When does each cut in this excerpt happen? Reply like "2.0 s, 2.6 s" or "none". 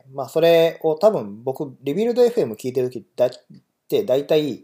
none